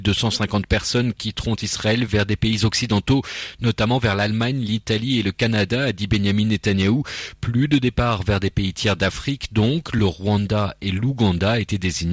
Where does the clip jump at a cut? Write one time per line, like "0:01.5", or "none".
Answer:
none